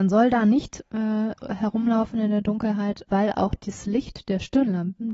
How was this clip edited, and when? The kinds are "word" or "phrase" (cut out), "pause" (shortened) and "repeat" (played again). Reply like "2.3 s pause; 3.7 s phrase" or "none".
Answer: 1.4 s word; 3.1 s word